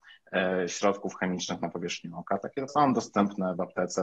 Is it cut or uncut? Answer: cut